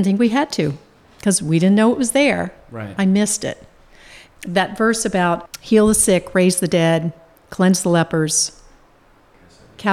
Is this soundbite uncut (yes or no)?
yes